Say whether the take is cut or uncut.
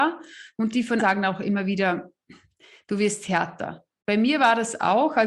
cut